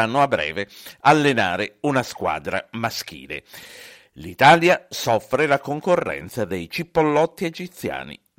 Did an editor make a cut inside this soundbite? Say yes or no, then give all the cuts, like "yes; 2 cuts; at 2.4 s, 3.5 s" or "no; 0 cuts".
no; 0 cuts